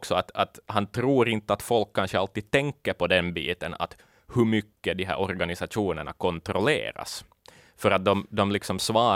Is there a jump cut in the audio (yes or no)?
no